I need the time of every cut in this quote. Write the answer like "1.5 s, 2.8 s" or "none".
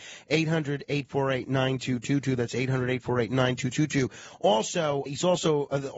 5.1 s